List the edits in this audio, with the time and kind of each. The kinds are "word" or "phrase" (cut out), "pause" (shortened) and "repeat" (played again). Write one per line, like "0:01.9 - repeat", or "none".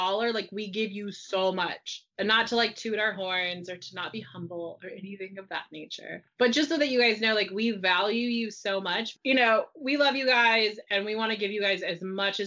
none